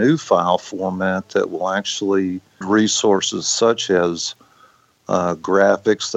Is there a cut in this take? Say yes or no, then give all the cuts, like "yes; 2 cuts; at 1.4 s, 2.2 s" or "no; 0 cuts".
yes; 1 cut; at 2.6 s